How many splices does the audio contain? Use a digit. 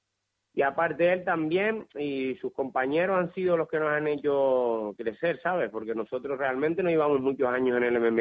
0